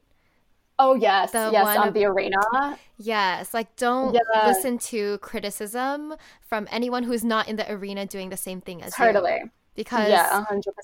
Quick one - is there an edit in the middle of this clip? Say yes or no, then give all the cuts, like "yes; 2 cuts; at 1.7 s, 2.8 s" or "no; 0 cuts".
no; 0 cuts